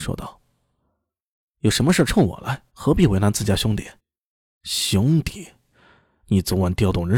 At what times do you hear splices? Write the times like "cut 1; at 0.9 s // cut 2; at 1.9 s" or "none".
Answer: cut 1; at 2.7 s // cut 2; at 4.0 s